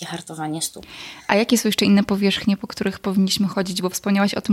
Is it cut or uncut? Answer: uncut